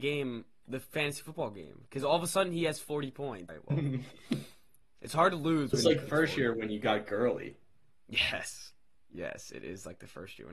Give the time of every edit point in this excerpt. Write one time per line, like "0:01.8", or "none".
0:03.5
0:06.0